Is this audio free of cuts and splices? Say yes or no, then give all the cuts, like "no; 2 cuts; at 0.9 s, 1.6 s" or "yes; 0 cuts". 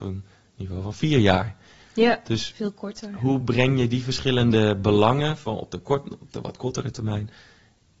yes; 0 cuts